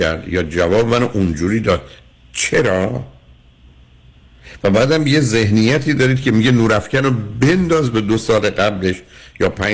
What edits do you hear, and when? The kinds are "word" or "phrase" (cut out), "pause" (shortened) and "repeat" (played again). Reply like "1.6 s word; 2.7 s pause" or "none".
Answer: none